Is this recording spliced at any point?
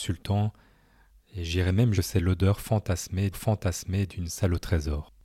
yes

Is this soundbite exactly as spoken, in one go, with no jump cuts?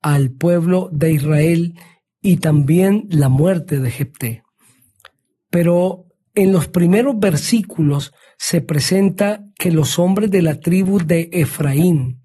yes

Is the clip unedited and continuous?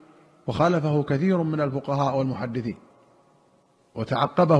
yes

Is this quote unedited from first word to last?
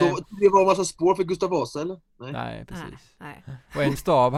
yes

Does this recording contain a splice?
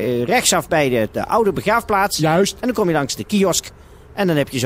no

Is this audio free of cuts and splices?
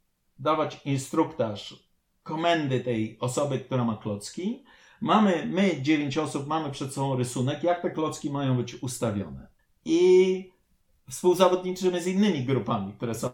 yes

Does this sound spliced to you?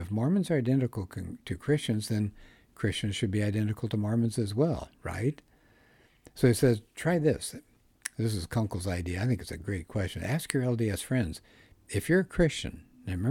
no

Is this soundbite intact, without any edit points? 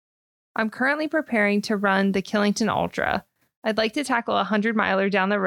yes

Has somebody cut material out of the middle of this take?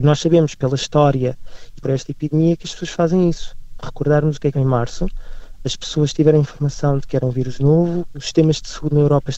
yes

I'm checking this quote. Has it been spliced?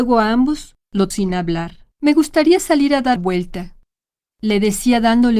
yes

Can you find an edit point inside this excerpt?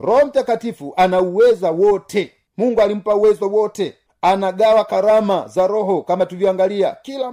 no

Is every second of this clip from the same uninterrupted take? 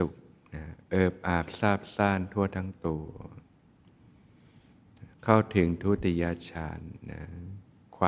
no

